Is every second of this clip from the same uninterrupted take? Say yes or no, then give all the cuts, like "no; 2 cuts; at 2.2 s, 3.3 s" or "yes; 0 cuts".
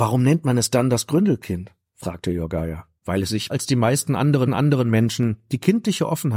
no; 3 cuts; at 3.0 s, 3.5 s, 4.5 s